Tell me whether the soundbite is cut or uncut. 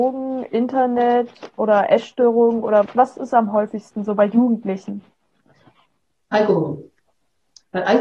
cut